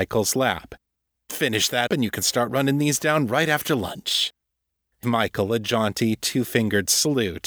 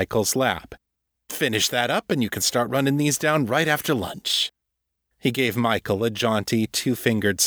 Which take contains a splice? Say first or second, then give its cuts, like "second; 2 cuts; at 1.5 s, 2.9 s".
first; 2 cuts; at 1.9 s, 5.0 s